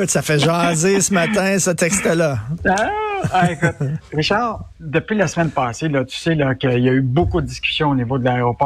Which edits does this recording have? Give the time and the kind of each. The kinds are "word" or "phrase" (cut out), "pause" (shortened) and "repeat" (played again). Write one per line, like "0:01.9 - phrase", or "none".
none